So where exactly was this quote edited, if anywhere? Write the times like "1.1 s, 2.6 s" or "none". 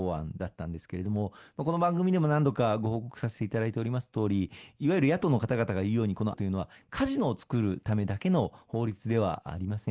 6.3 s